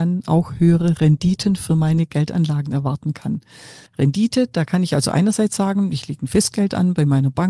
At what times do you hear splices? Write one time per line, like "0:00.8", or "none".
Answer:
0:03.9